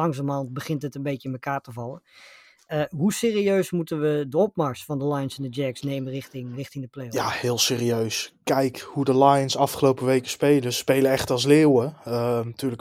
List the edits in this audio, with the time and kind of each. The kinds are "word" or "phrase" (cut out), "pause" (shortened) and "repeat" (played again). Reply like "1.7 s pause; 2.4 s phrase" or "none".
6.5 s word